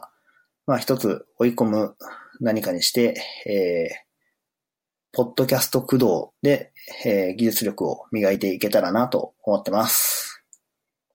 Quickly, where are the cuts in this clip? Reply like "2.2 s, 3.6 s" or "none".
6.4 s